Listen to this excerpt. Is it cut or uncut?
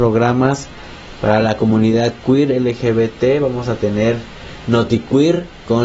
uncut